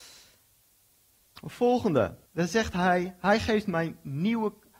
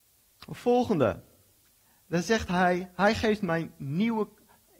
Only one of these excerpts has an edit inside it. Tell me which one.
first; 1 cut; at 2.3 s

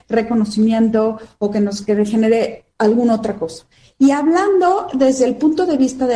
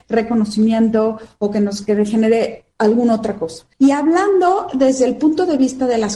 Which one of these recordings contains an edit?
second; 1 cut; at 3.7 s

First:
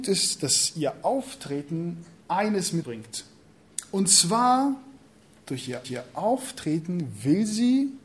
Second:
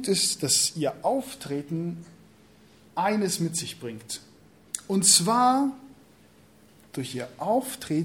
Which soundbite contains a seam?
first; 4 cuts; at 2.2 s, 2.8 s, 5.1 s, 5.8 s

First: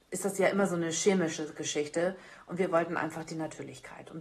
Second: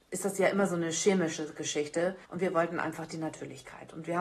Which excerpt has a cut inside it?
second; 1 cut; at 2.2 s

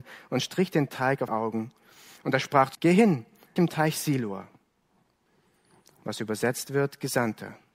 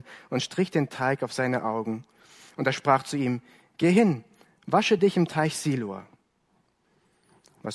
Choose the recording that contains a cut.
first; 3 cuts; at 1.3 s, 2.7 s, 3.6 s

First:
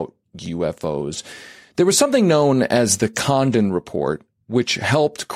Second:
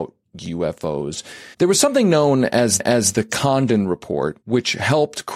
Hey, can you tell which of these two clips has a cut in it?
second; 3 cuts; at 1.5 s, 2.8 s, 4.4 s

